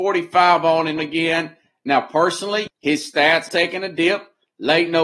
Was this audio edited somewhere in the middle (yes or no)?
yes